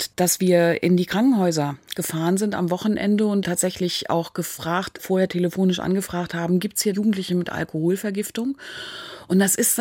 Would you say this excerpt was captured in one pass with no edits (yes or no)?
no